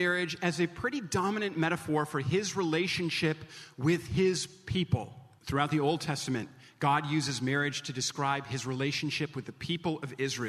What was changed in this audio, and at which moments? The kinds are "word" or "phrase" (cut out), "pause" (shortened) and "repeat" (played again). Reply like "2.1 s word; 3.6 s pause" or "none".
none